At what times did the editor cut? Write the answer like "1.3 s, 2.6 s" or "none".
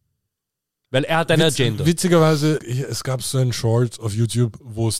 2.6 s